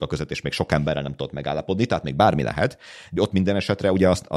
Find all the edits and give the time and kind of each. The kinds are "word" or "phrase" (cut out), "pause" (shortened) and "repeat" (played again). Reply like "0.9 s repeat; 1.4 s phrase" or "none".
3.2 s word